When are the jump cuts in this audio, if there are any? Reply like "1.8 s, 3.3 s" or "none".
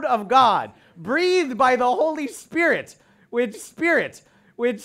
3.5 s